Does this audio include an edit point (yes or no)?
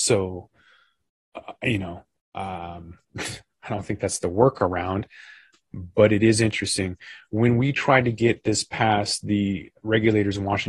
yes